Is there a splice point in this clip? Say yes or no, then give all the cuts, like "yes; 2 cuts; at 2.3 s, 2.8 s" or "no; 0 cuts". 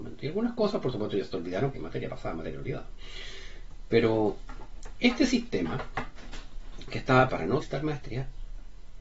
yes; 3 cuts; at 1.7 s, 7.3 s, 7.6 s